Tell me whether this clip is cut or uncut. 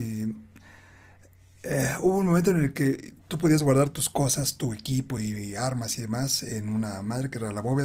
uncut